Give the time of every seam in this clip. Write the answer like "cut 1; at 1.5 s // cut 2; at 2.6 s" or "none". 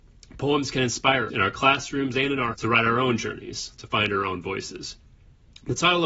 cut 1; at 1.3 s // cut 2; at 2.5 s